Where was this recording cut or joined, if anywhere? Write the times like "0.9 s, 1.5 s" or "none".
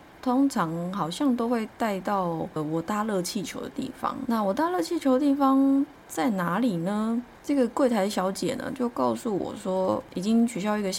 none